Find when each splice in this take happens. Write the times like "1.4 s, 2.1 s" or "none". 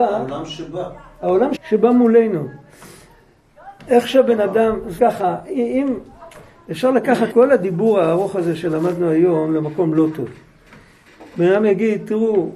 1.6 s, 5.0 s, 7.3 s